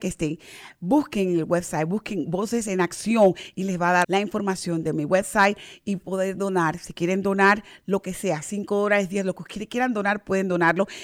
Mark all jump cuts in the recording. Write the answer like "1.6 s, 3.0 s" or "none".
4.0 s